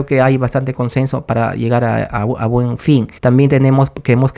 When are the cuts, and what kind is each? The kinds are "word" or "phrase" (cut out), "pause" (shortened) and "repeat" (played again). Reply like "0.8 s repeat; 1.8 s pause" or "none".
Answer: 3.2 s pause